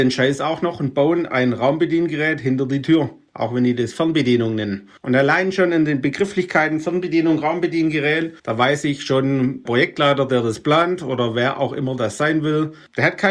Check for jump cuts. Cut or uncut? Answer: cut